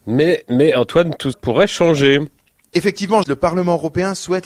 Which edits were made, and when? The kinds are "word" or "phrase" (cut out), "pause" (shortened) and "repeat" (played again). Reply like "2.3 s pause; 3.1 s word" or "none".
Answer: 1.3 s word; 3.2 s word